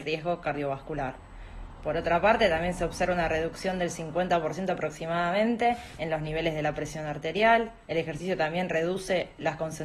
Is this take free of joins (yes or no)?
no